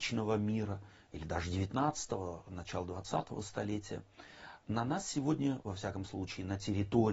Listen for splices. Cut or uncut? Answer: uncut